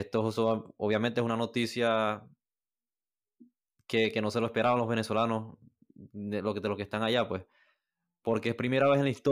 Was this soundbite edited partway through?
no; 0 cuts

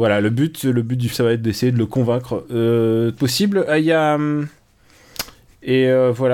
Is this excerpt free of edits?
no; 2 cuts; at 1.1 s, 3.2 s

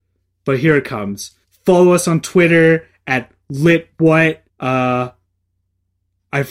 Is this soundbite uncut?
no; 2 cuts; at 1.4 s, 4.5 s

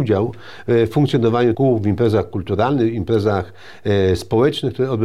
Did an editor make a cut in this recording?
yes; 1 cut; at 1.5 s

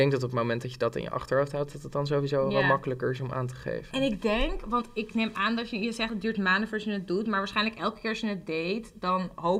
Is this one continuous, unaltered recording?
yes; 0 cuts

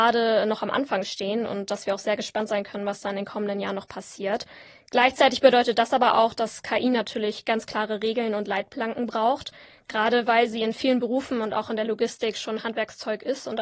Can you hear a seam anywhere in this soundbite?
no; 0 cuts

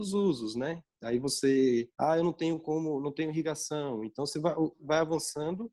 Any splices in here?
yes; 2 cuts; at 1.9 s, 4.7 s

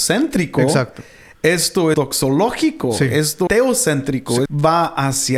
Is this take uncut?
no; 3 cuts; at 1.9 s, 3.5 s, 4.5 s

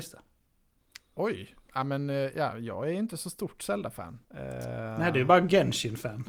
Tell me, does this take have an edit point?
yes; 1 cut; at 4.2 s

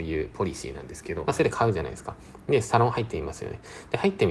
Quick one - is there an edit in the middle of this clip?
yes; 1 cut; at 1.2 s

